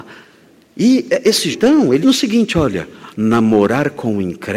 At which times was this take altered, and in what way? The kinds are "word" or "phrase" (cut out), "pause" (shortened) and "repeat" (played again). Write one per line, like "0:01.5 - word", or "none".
0:01.5 - word
0:02.0 - word